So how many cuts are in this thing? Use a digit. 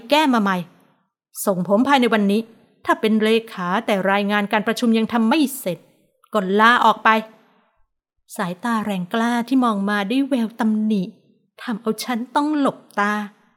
0